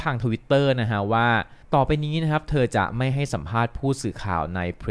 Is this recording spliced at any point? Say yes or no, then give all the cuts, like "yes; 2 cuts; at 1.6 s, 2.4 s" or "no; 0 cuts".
yes; 1 cut; at 1.6 s